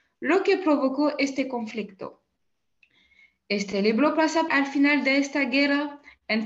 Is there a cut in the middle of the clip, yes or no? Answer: yes